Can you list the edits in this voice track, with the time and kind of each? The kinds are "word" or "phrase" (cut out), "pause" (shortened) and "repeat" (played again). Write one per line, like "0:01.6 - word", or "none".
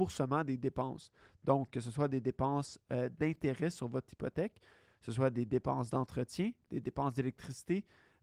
none